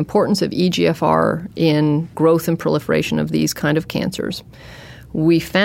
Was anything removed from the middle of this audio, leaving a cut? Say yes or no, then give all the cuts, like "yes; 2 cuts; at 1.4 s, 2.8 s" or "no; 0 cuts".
no; 0 cuts